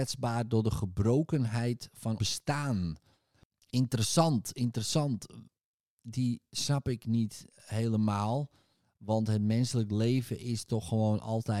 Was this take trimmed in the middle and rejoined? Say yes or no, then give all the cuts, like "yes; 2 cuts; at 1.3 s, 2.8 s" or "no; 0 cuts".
yes; 1 cut; at 2.2 s